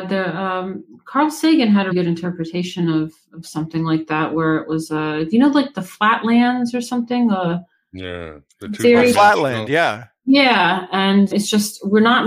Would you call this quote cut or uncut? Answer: cut